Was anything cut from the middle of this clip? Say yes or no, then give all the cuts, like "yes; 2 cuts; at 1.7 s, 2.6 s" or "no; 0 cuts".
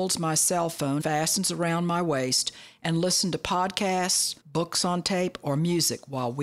yes; 2 cuts; at 1.0 s, 4.4 s